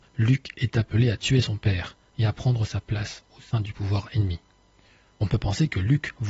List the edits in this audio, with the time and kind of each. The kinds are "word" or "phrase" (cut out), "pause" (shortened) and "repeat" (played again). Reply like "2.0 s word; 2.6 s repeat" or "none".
none